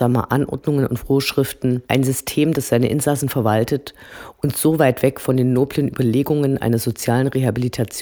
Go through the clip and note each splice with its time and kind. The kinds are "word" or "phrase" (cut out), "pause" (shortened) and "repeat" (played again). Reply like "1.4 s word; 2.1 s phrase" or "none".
1.8 s pause